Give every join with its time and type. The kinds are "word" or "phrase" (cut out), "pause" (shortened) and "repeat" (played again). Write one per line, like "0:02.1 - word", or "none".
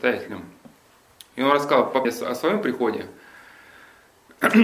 0:02.0 - word